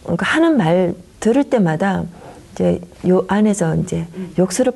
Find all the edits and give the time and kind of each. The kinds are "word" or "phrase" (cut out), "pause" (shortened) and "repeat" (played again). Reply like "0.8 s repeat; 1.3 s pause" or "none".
2.9 s pause